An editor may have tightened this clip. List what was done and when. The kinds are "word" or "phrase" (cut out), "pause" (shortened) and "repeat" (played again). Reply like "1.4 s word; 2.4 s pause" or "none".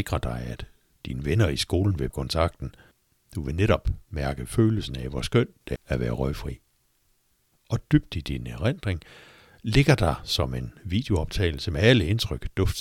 2.1 s word; 5.8 s word